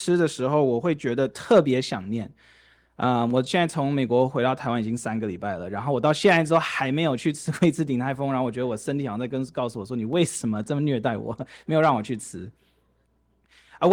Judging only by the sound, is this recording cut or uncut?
uncut